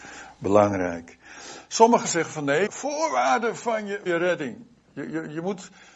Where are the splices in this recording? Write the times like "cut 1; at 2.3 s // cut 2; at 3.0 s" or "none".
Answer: cut 1; at 2.7 s // cut 2; at 4.1 s